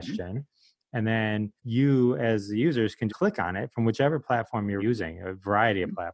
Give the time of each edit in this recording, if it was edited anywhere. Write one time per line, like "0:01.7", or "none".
0:01.6
0:03.1
0:04.8